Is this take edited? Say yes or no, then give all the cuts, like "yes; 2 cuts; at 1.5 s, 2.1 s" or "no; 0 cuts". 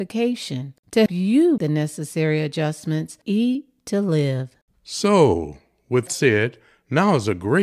yes; 4 cuts; at 1.1 s, 1.6 s, 3.2 s, 6.1 s